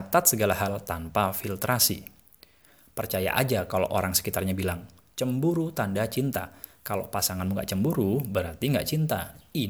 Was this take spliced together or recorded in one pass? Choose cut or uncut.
uncut